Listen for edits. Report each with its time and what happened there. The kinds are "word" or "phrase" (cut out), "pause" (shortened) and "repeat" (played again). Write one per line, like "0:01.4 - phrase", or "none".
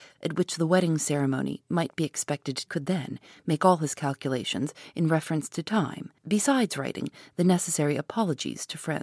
0:02.7 - phrase
0:06.2 - pause